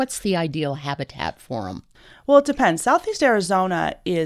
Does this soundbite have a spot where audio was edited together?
no; 0 cuts

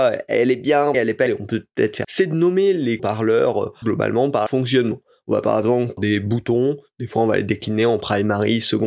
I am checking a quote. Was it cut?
yes; 7 cuts; at 0.9 s, 1.3 s, 2.0 s, 3.0 s, 3.8 s, 4.5 s, 6.0 s

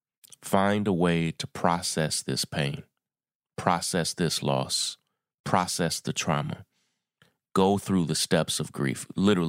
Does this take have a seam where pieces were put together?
no; 0 cuts

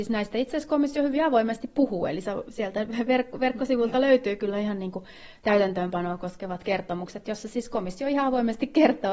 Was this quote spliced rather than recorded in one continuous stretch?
no; 0 cuts

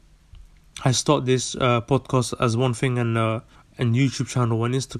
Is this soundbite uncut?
no; 1 cut; at 3.6 s

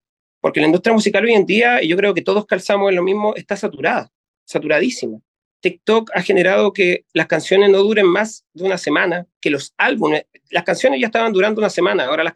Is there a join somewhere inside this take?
no; 0 cuts

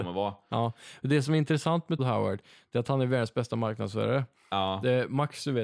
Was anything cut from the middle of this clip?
yes; 1 cut; at 2.0 s

